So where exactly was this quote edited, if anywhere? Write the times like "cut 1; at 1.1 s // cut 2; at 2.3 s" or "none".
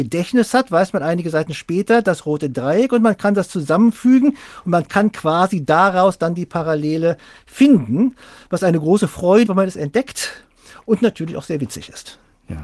cut 1; at 9.5 s